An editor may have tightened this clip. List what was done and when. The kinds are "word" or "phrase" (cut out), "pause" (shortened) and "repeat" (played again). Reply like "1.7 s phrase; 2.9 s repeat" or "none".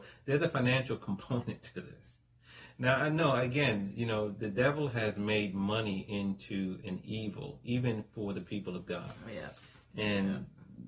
none